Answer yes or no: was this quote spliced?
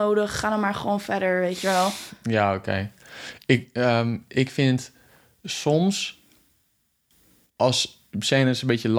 no